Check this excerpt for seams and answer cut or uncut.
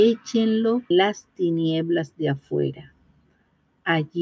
cut